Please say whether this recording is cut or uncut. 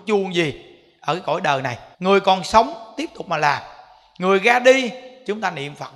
cut